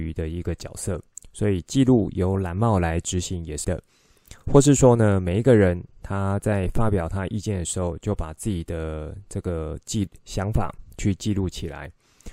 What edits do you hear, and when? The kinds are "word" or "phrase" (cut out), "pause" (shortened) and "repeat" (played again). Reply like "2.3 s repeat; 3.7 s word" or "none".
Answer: 3.6 s word